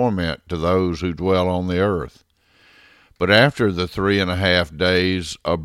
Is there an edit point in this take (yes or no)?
no